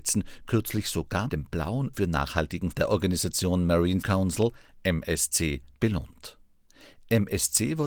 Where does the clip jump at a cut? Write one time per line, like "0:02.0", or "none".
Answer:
0:01.3
0:01.9
0:02.7
0:04.0